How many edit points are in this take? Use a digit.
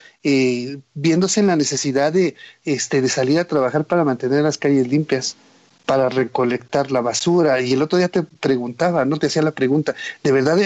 0